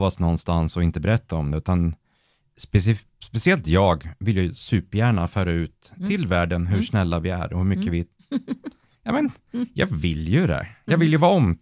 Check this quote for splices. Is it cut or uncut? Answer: uncut